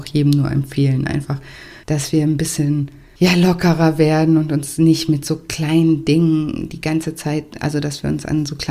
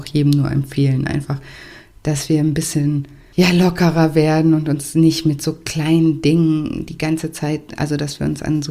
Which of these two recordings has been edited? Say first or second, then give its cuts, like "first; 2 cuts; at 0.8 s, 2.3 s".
first; 1 cut; at 1.8 s